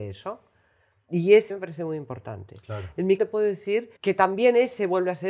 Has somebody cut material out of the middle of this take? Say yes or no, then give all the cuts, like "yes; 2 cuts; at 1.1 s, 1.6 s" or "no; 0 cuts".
yes; 3 cuts; at 1.5 s, 3.2 s, 4.0 s